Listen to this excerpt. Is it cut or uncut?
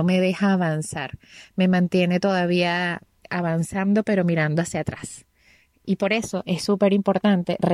uncut